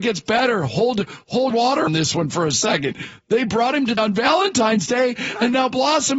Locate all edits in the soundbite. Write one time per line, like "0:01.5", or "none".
0:01.5
0:01.9
0:04.0